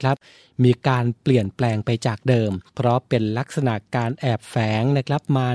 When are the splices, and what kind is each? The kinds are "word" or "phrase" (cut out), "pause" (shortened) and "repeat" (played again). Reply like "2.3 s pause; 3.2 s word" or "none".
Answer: 2.7 s pause

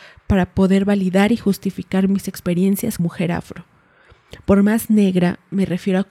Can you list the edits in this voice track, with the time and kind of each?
3.0 s word

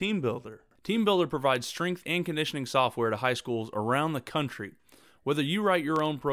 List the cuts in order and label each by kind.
none

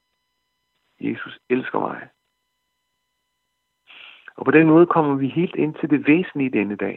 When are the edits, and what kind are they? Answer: none

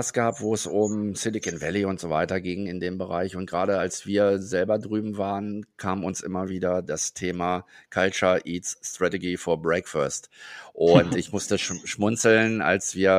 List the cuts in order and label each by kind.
none

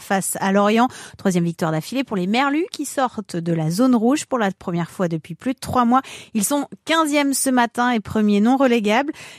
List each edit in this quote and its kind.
none

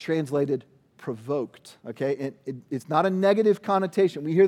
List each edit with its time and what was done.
1.8 s pause

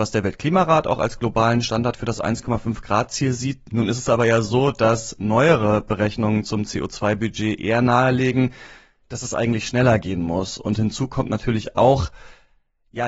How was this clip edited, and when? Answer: none

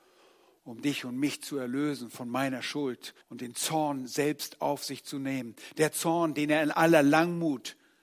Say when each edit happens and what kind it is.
3.2 s pause

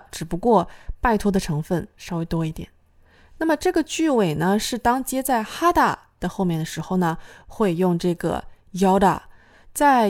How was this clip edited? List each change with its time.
none

